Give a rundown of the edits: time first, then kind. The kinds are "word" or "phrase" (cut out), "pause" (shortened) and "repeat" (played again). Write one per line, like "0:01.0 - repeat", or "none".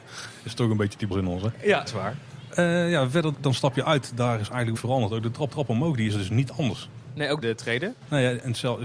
0:01.1 - word
0:01.9 - word
0:03.3 - word
0:04.8 - word
0:05.5 - repeat
0:07.4 - phrase